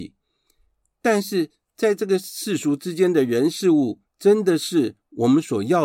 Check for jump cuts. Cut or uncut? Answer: cut